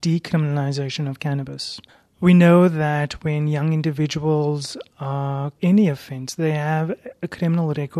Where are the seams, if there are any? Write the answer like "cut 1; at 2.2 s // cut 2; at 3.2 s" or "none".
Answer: cut 1; at 1.9 s // cut 2; at 5.6 s